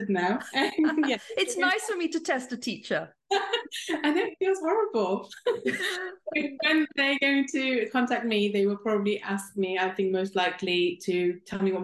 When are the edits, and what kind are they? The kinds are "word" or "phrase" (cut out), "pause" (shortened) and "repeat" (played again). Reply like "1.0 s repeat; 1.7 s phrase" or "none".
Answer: 3.2 s pause